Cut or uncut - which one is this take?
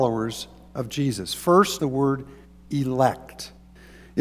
cut